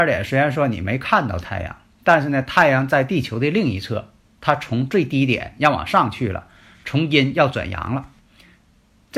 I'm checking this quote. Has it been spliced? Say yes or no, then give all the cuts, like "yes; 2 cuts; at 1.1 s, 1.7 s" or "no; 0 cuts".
no; 0 cuts